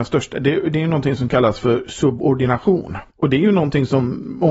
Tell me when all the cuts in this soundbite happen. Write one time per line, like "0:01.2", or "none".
0:03.1